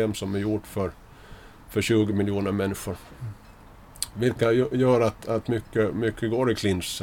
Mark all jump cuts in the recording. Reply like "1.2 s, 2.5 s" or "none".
none